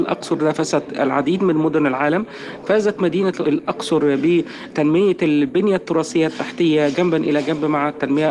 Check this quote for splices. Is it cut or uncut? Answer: uncut